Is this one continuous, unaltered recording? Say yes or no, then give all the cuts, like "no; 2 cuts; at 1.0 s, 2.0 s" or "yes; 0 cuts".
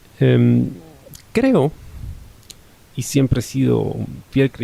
no; 1 cut; at 2.8 s